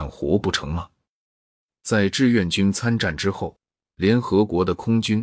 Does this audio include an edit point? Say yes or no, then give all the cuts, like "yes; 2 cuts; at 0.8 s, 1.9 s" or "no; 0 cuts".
no; 0 cuts